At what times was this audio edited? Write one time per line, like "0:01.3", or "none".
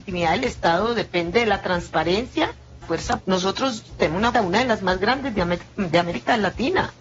0:02.8
0:03.2
0:04.3